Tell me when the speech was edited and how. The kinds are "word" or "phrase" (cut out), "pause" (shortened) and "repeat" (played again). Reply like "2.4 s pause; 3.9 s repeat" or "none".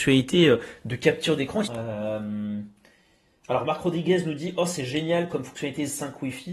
1.6 s phrase